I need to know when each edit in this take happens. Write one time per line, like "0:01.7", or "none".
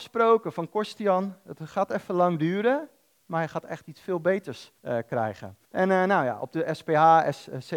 0:04.8
0:05.6

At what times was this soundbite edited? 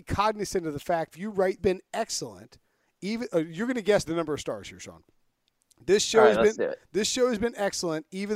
0:01.1
0:01.6
0:04.1

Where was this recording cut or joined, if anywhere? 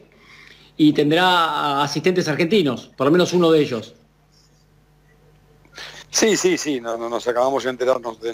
0:02.9
0:06.0

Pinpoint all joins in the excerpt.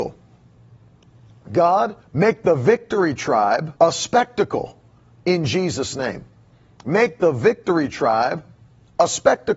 0:02.0
0:03.8
0:06.5

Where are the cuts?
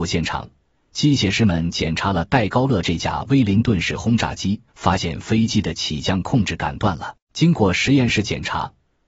0:04.7
0:07.2

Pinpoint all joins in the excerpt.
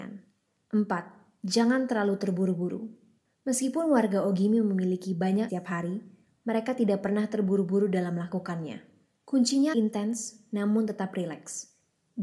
0:05.5
0:09.7

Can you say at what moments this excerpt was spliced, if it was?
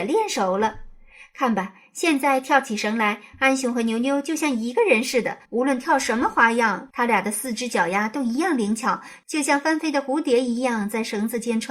0:05.4

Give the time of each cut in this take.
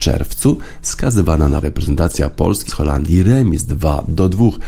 0:01.6
0:02.7

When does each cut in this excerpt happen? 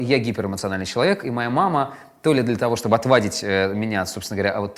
none

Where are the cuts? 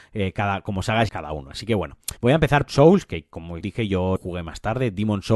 0:01.1
0:02.2
0:02.7
0:03.6
0:04.2

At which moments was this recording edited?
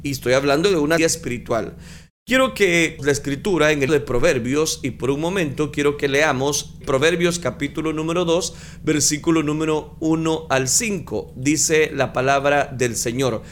0:01.0
0:03.0
0:03.9
0:06.8

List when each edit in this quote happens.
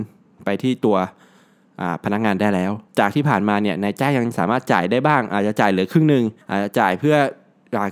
0:02.9
0:06.4

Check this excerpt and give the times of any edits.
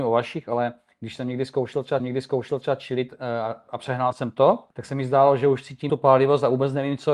0:02.0
0:04.7
0:05.9

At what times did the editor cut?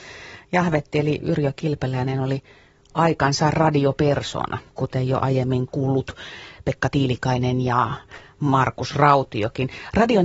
none

